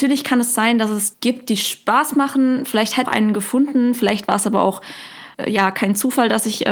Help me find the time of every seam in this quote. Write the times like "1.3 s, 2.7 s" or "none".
1.1 s, 3.0 s, 5.3 s